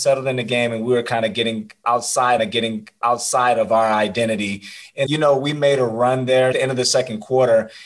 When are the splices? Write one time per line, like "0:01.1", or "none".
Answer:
0:02.4
0:05.1
0:06.5